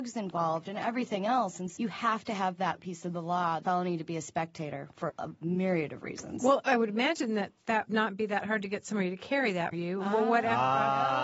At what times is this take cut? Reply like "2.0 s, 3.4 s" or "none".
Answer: 1.8 s, 3.6 s, 5.1 s, 7.9 s, 9.7 s